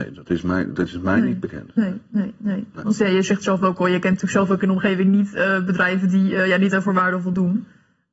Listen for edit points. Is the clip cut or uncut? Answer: uncut